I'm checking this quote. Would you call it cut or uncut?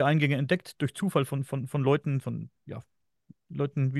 uncut